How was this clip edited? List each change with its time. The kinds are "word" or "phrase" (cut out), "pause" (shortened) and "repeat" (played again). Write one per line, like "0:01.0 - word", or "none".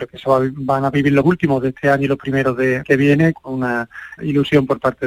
0:01.2 - word
0:02.8 - word
0:03.3 - word
0:04.2 - word